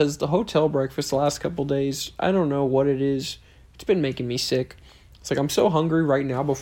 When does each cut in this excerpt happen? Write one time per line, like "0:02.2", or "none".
none